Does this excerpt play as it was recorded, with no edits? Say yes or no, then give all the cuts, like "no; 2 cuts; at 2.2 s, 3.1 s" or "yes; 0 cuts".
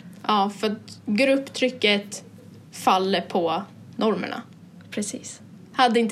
yes; 0 cuts